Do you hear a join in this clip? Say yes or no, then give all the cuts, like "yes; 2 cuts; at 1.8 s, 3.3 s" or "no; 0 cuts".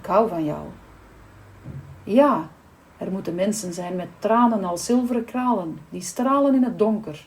no; 0 cuts